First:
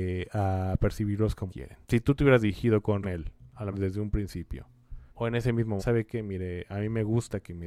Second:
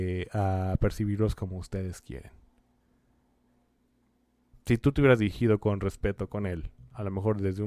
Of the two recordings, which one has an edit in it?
first; 6 cuts; at 1.5 s, 1.8 s, 3.0 s, 3.7 s, 5.1 s, 5.8 s

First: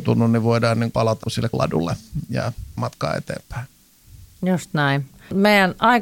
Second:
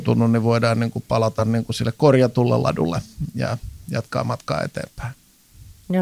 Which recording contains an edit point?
first; 4 cuts; at 0.9 s, 1.2 s, 1.5 s, 2.8 s

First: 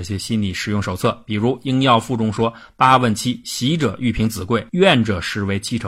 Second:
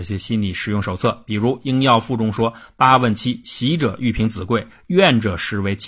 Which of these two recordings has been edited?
first; 1 cut; at 4.7 s

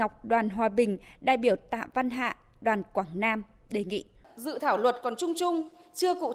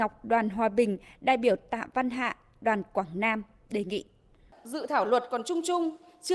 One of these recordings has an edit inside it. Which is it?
first; 1 cut; at 4.1 s

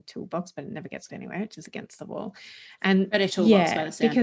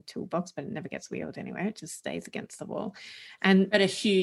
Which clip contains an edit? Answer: first; 3 cuts; at 1.1 s, 1.6 s, 3.3 s

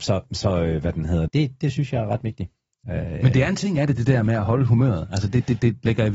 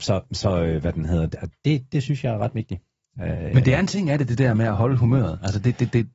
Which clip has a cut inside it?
first; 1 cut; at 1.3 s

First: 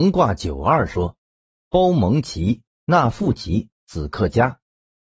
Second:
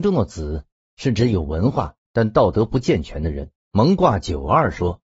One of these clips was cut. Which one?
second; 1 cut; at 3.6 s

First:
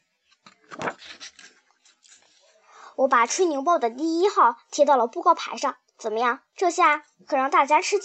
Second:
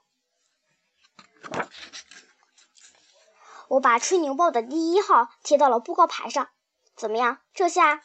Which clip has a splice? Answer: first; 1 cut; at 5.9 s

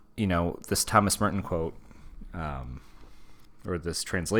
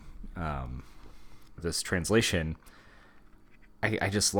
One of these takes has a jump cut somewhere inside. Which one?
second; 1 cut; at 1.6 s

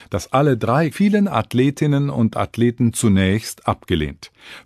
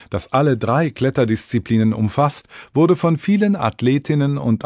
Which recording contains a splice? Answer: first; 1 cut; at 0.9 s

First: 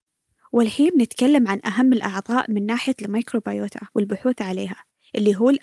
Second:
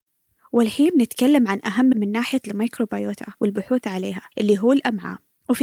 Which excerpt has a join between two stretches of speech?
second; 2 cuts; at 1.9 s, 4.3 s

